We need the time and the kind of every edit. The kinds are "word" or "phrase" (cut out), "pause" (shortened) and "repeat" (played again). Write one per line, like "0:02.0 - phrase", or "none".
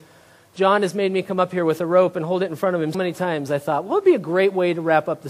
0:02.9 - word